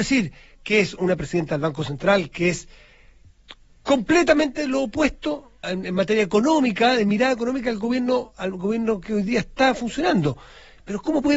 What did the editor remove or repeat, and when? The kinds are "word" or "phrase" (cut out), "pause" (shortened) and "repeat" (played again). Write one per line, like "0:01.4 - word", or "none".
0:01.0 - word
0:03.7 - pause
0:05.6 - word